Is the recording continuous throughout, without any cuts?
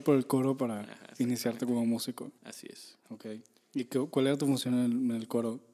no; 2 cuts; at 2.4 s, 3.0 s

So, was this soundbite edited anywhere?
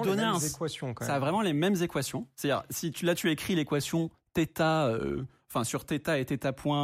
no; 0 cuts

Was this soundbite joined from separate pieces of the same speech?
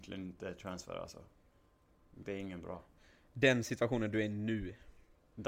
no; 0 cuts

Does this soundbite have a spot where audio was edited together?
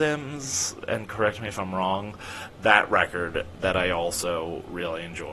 no; 0 cuts

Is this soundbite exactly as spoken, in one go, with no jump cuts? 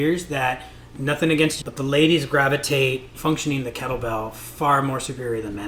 no; 2 cuts; at 1.6 s, 3.1 s

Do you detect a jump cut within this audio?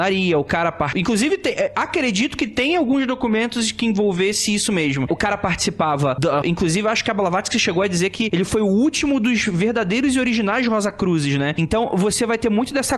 yes; 1 cut; at 6.4 s

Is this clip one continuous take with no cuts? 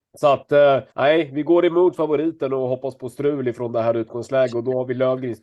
no; 1 cut; at 0.9 s

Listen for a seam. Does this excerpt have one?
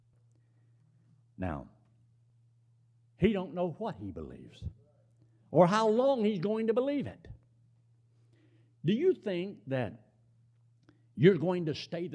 no; 0 cuts

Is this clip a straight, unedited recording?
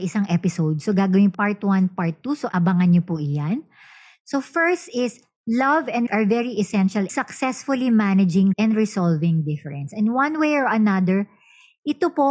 no; 4 cuts; at 1.3 s, 6.1 s, 7.1 s, 8.5 s

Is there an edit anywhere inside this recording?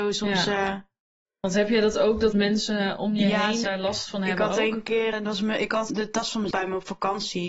yes; 5 cuts; at 2.3 s, 3.6 s, 5.1 s, 5.9 s, 6.5 s

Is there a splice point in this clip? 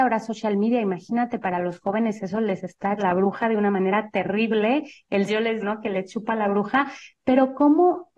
yes; 3 cuts; at 3.0 s, 5.3 s, 5.6 s

